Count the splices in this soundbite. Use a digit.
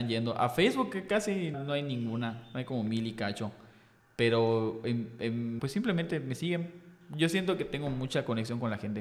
2